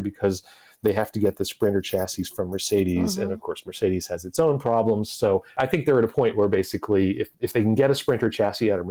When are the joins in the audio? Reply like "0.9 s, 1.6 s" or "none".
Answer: 5.5 s